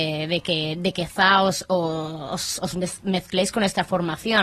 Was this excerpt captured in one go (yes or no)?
yes